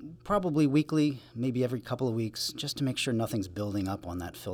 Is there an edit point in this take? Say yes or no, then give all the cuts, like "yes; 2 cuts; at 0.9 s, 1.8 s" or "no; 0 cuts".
no; 0 cuts